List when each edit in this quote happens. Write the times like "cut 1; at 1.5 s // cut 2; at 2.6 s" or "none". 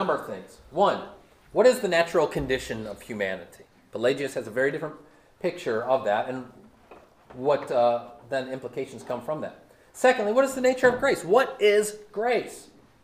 none